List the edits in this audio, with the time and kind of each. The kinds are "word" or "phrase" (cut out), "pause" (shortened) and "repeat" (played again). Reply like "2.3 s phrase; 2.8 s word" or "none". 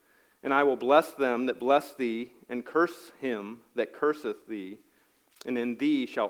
none